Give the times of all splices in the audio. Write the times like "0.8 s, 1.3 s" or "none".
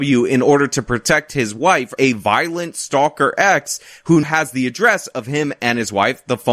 2.0 s, 4.2 s